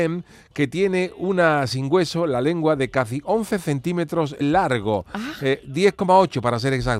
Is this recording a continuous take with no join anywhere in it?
no; 1 cut; at 4.4 s

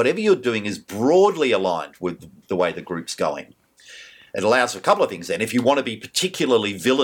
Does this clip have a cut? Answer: no; 0 cuts

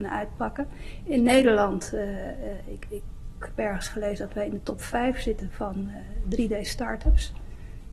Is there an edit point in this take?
no; 0 cuts

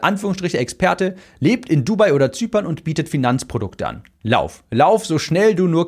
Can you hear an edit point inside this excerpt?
no; 0 cuts

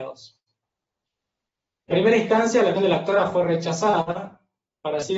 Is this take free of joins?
no; 2 cuts; at 1.9 s, 2.8 s

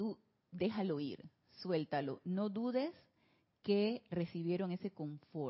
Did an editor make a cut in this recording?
no; 0 cuts

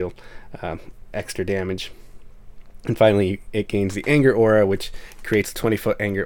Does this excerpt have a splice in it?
no; 0 cuts

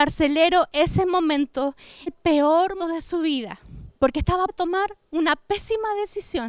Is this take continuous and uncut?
no; 4 cuts; at 2.1 s, 2.8 s, 4.0 s, 4.5 s

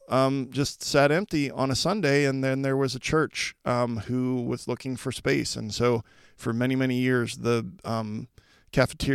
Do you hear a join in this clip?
no; 0 cuts

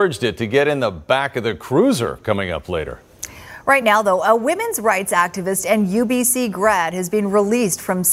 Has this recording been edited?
no; 0 cuts

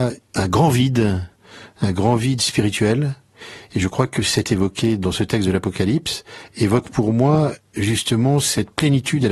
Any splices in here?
yes; 1 cut; at 4.4 s

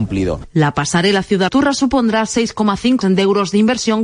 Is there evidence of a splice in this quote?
yes; 2 cuts; at 1.5 s, 3.0 s

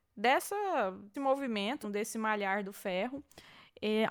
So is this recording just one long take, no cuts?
no; 2 cuts; at 1.1 s, 1.8 s

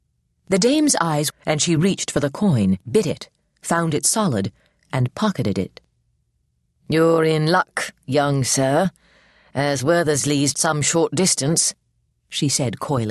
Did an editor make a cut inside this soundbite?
yes; 3 cuts; at 1.3 s, 2.8 s, 10.5 s

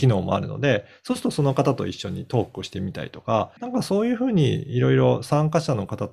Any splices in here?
yes; 1 cut; at 3.6 s

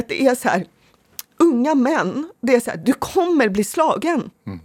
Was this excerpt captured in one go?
yes; 0 cuts

